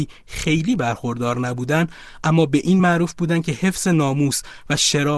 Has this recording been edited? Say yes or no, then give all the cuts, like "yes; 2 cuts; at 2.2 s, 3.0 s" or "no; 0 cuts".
no; 0 cuts